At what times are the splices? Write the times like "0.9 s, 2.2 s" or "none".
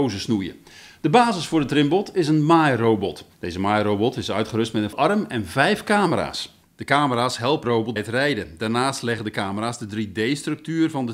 3.3 s, 4.9 s, 6.6 s, 7.6 s, 8.0 s